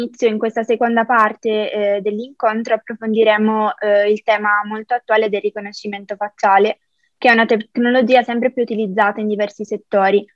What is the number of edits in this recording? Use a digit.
0